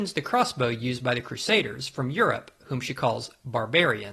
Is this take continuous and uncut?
yes; 0 cuts

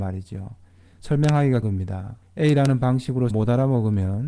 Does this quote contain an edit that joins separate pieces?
yes; 3 cuts; at 1.6 s, 2.2 s, 3.3 s

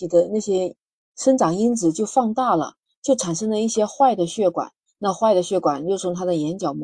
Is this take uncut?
yes; 0 cuts

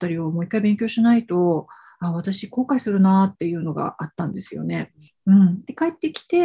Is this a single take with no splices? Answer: yes; 0 cuts

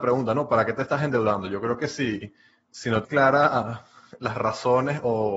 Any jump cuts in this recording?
yes; 1 cut; at 3.0 s

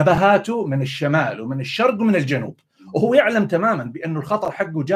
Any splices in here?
no; 0 cuts

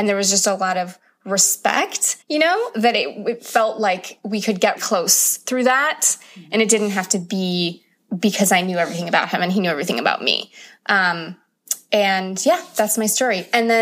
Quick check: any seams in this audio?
yes; 3 cuts; at 2.2 s, 4.8 s, 8.0 s

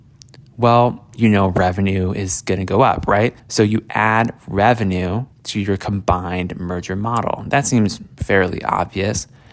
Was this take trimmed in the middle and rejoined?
yes; 2 cuts; at 3.4 s, 5.3 s

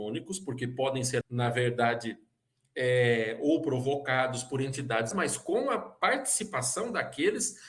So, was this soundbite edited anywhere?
yes; 2 cuts; at 1.2 s, 5.1 s

